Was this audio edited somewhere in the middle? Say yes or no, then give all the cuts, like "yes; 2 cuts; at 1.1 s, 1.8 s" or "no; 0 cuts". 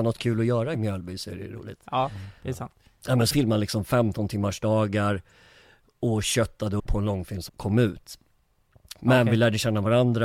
yes; 3 cuts; at 3.3 s, 6.8 s, 7.5 s